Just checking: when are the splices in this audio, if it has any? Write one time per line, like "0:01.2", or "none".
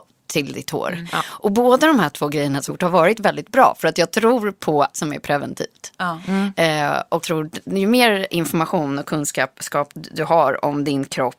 0:02.7
0:04.9
0:07.2
0:08.3
0:09.9